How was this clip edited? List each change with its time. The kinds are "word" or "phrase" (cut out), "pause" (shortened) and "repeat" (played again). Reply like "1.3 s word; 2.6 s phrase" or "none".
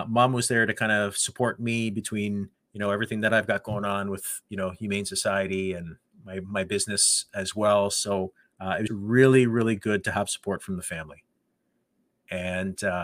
2.5 s pause; 8.4 s pause; 8.9 s word